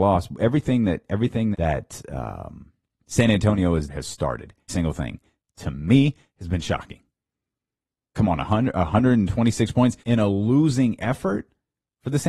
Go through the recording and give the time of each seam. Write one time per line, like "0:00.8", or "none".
0:01.5
0:02.9
0:03.9
0:04.7
0:08.1
0:10.0